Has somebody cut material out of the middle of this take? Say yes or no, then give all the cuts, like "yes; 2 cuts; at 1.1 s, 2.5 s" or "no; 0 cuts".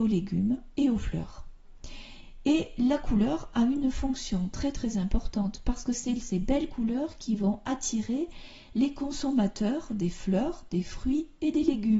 no; 0 cuts